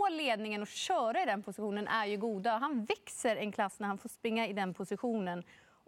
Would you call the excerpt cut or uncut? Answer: uncut